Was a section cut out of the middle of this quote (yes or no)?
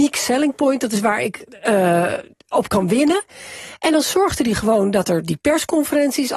no